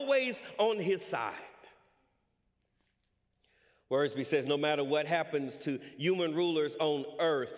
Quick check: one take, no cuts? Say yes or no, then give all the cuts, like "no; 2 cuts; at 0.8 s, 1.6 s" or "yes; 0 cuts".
yes; 0 cuts